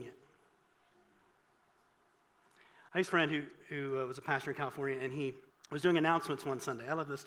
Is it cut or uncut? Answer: cut